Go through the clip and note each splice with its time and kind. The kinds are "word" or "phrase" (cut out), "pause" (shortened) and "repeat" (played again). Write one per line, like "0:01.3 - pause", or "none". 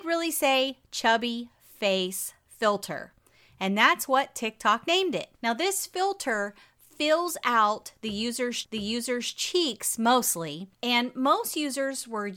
0:05.3 - pause
0:08.6 - repeat
0:10.7 - pause